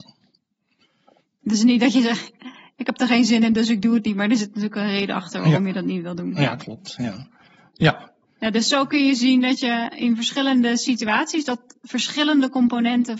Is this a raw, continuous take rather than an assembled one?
yes; 0 cuts

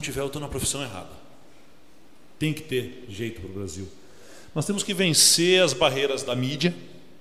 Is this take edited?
no; 0 cuts

